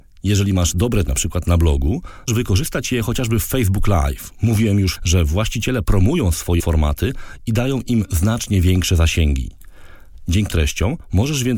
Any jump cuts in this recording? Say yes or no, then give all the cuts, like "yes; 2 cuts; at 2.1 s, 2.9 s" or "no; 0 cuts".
yes; 6 cuts; at 1.1 s, 2.3 s, 5.0 s, 5.8 s, 6.6 s, 10.5 s